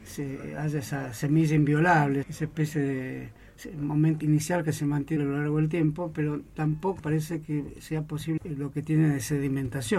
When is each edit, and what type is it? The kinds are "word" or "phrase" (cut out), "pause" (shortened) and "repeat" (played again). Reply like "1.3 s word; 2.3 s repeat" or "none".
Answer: 2.2 s word; 4.2 s word; 5.2 s word; 7.0 s word; 8.4 s word